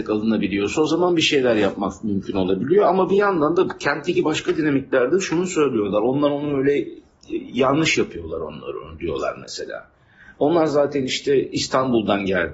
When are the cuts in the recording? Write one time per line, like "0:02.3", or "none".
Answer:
none